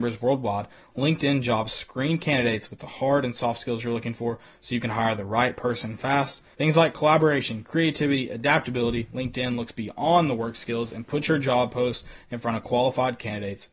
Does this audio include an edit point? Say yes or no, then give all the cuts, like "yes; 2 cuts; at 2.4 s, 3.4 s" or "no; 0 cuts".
yes; 1 cut; at 6.5 s